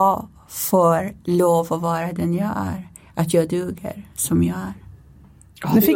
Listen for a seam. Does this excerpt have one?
no; 0 cuts

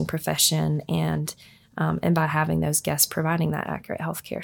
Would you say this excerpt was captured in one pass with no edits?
yes; 0 cuts

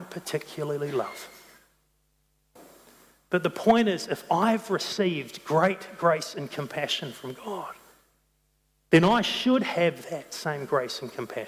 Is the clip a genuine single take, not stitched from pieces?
yes; 0 cuts

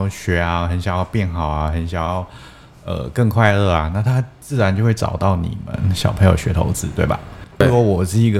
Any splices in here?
no; 0 cuts

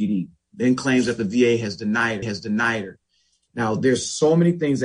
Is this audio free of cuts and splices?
no; 1 cut; at 2.2 s

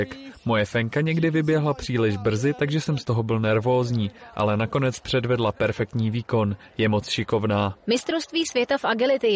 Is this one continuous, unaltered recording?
yes; 0 cuts

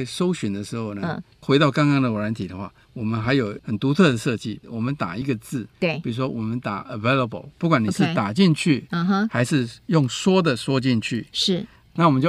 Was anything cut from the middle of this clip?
yes; 2 cuts; at 2.8 s, 5.7 s

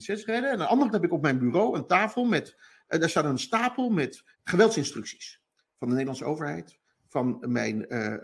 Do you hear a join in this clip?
yes; 2 cuts; at 0.9 s, 4.3 s

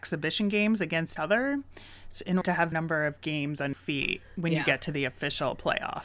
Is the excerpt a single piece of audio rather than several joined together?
no; 4 cuts; at 1.2 s, 2.4 s, 2.7 s, 3.7 s

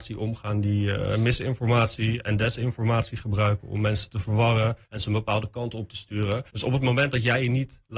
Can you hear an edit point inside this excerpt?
yes; 2 cuts; at 4.8 s, 6.5 s

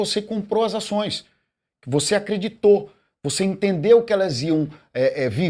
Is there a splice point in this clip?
no; 0 cuts

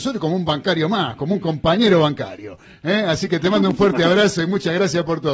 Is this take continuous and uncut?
yes; 0 cuts

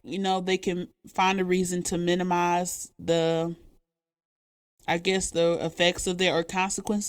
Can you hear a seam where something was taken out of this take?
no; 0 cuts

